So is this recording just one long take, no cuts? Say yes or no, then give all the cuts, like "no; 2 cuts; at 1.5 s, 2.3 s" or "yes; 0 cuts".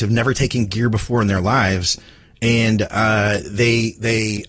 yes; 0 cuts